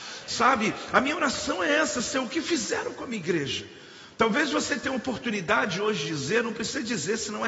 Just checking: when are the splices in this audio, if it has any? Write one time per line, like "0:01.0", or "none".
none